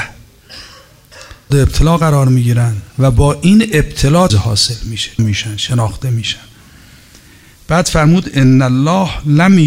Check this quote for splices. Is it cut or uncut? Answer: cut